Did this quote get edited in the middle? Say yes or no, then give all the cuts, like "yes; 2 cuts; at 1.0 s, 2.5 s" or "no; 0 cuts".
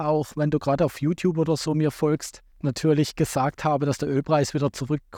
yes; 1 cut; at 2.5 s